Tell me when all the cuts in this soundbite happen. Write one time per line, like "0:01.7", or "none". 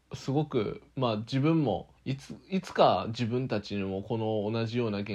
0:02.0